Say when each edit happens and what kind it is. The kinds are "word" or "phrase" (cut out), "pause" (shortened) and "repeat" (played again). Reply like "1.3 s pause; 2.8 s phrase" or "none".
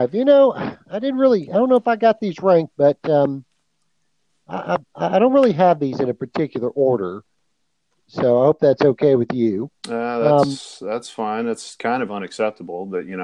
none